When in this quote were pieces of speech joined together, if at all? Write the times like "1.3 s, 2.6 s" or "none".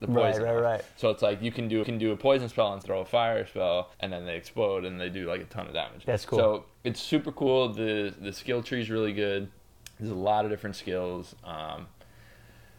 1.8 s, 2.8 s, 3.9 s